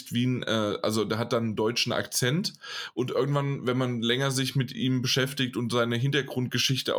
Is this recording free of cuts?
yes; 0 cuts

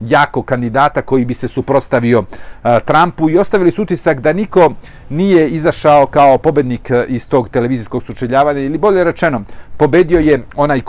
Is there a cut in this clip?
no; 0 cuts

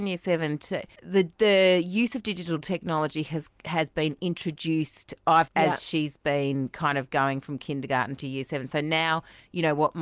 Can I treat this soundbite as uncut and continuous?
no; 2 cuts; at 1.0 s, 5.5 s

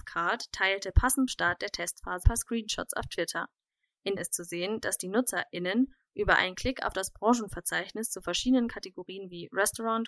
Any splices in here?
yes; 3 cuts; at 1.3 s, 2.2 s, 4.2 s

